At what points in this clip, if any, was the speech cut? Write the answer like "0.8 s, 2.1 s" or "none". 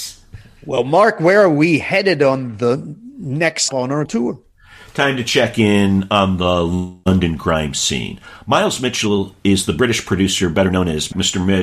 3.7 s, 4.1 s